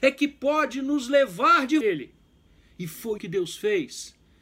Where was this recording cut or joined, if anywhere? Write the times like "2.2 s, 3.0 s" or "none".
1.8 s, 2.5 s, 3.2 s